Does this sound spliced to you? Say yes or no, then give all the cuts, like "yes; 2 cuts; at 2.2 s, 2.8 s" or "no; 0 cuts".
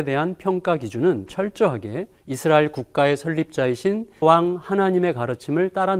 yes; 2 cuts; at 2.2 s, 4.2 s